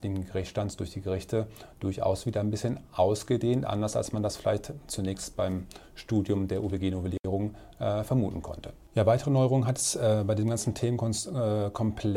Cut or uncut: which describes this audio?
uncut